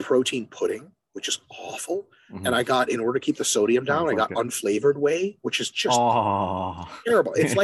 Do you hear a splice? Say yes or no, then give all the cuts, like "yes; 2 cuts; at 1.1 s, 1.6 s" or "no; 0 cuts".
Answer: no; 0 cuts